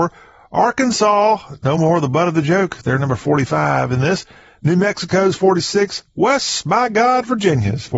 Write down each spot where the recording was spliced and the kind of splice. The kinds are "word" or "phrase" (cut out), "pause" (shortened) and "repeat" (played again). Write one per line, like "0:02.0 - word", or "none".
none